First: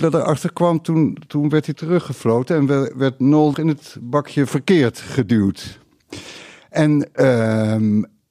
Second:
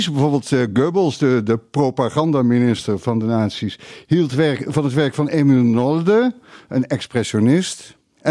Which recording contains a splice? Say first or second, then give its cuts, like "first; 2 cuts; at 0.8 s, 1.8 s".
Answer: first; 2 cuts; at 1.7 s, 3.5 s